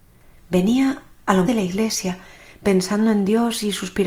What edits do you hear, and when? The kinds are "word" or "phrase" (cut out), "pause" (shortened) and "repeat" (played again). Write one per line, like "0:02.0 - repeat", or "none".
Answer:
0:01.5 - word